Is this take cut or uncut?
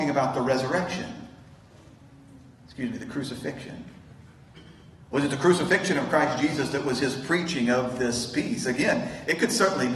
uncut